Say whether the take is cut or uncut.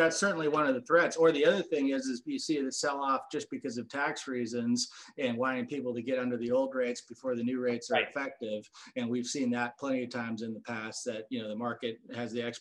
uncut